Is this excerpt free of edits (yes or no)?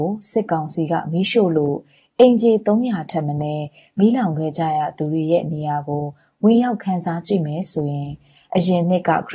yes